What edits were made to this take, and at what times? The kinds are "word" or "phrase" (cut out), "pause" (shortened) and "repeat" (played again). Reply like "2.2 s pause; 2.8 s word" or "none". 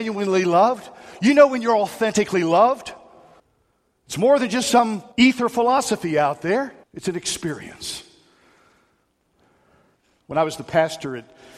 3.4 s pause; 5.1 s pause; 6.8 s pause